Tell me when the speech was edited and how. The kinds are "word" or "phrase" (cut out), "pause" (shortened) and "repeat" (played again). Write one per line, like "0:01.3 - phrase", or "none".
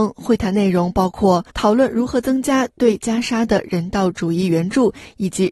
0:01.5 - pause